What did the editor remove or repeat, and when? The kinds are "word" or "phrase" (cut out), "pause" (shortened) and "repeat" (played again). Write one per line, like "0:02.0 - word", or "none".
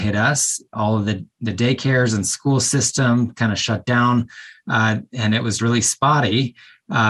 0:05.6 - word